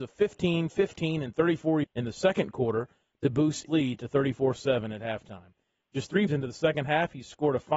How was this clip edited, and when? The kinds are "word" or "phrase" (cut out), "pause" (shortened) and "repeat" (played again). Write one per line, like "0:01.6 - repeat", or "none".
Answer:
0:01.8 - word
0:03.7 - word
0:06.3 - word